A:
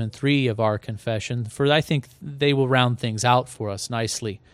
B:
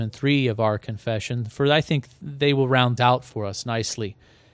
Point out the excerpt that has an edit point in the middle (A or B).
B